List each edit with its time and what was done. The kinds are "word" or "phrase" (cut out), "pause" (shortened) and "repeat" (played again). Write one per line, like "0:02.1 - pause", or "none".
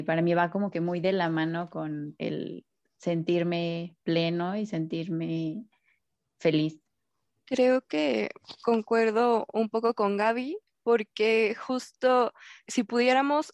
none